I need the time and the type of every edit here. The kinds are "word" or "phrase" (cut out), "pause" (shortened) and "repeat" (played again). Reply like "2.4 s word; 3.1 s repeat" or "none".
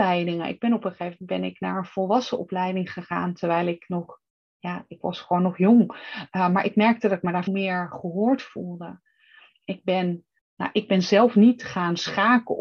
5.0 s word; 7.5 s word; 10.4 s word